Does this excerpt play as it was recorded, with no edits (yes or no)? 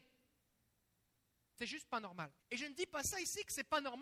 no